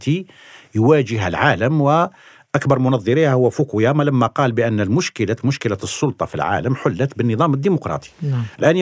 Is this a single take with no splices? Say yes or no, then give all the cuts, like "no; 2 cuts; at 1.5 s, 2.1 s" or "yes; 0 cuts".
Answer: yes; 0 cuts